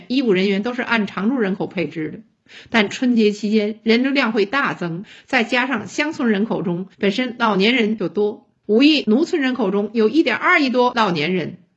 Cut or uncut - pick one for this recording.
cut